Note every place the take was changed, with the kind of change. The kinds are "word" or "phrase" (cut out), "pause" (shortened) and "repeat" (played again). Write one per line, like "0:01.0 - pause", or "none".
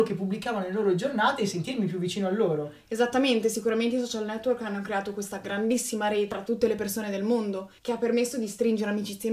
0:07.8 - pause